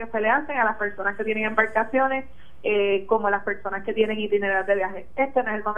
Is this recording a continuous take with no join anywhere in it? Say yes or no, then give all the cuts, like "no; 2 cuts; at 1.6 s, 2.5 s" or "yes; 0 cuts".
yes; 0 cuts